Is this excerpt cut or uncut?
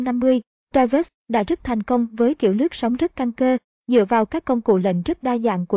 uncut